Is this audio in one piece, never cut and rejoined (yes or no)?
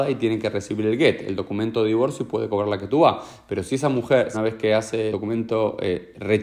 no